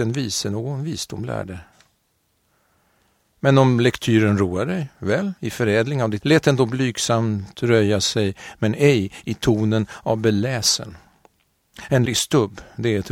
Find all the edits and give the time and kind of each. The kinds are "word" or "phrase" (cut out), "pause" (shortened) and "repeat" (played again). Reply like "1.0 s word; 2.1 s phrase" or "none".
5.4 s pause; 6.2 s word; 12.1 s word